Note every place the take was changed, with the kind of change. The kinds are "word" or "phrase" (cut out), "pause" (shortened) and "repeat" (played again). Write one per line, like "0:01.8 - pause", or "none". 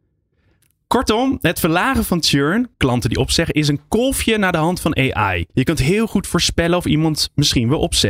0:02.7 - pause
0:05.5 - pause